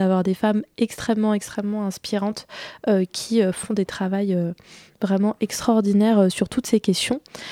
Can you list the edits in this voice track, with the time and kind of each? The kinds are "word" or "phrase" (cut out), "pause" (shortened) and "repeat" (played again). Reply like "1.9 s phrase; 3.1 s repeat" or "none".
none